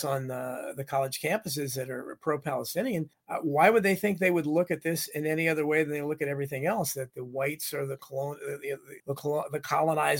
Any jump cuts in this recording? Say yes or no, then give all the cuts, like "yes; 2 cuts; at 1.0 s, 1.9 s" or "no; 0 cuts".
yes; 2 cuts; at 3.1 s, 9.0 s